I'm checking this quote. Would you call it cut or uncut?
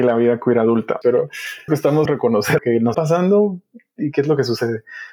cut